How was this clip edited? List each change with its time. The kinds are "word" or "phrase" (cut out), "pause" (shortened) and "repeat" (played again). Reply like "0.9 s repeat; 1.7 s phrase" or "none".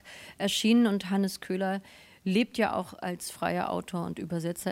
none